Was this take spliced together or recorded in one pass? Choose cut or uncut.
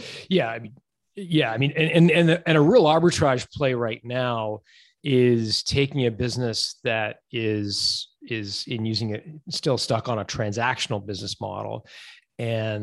uncut